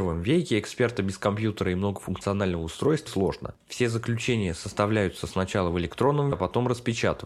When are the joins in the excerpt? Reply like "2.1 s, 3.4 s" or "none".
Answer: 3.1 s, 6.3 s